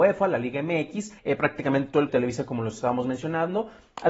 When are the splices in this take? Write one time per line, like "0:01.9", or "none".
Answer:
0:01.2
0:02.1